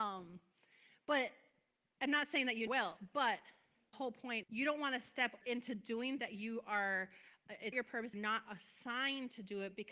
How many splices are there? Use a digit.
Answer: 7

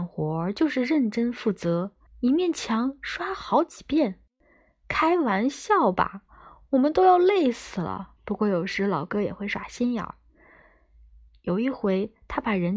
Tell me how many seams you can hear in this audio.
3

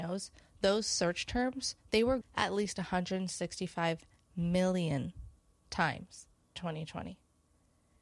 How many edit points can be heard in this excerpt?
2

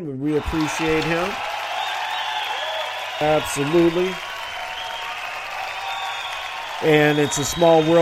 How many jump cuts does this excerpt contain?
0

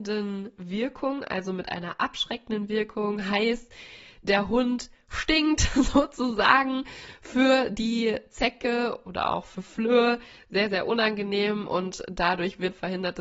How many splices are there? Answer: 0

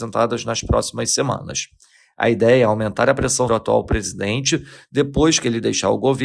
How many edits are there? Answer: 1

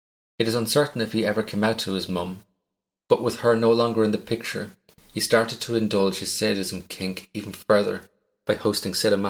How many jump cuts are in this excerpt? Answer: 0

